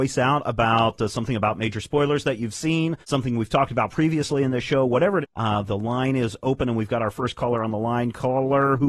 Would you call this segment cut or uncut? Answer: cut